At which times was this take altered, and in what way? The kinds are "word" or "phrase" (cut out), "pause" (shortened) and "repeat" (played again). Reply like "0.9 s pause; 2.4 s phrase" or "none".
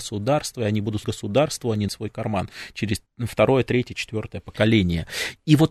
1.0 s word; 1.9 s word; 3.1 s pause

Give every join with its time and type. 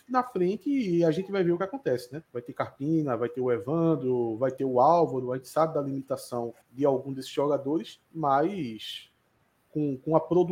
2.3 s pause; 6.6 s pause; 8.0 s pause

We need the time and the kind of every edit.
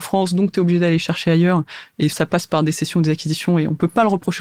2.1 s word

